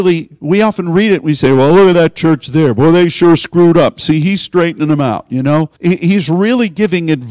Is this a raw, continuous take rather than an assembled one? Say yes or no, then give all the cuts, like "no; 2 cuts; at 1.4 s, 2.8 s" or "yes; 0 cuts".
no; 1 cut; at 5.7 s